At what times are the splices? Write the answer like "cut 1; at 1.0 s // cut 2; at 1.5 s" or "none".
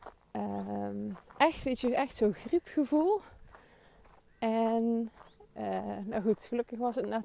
cut 1; at 1.3 s